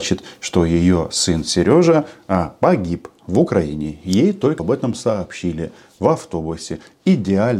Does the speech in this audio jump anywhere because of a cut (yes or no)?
yes